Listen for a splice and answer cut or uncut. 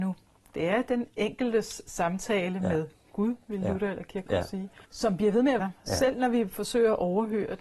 cut